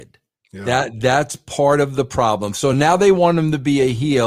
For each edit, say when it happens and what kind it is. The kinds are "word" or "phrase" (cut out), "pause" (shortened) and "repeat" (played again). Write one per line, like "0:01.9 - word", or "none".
none

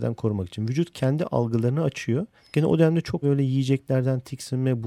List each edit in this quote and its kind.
0:02.4 - pause
0:03.2 - word

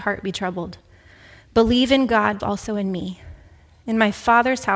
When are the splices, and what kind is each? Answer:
0:02.4 - word

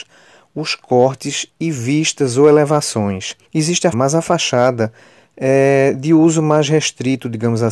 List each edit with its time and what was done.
0:03.5 - pause
0:03.9 - word

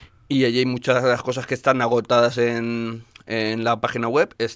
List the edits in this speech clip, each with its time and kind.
none

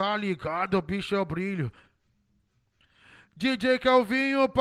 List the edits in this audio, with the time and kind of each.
none

